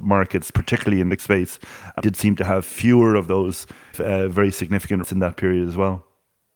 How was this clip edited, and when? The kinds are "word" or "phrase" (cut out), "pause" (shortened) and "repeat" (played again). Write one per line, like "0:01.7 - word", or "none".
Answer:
0:01.2 - word
0:02.0 - word
0:03.9 - phrase
0:05.0 - phrase